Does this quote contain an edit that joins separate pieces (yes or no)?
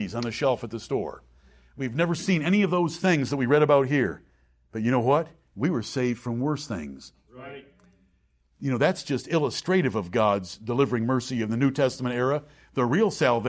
no